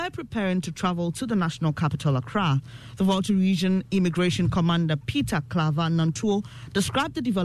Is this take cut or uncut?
uncut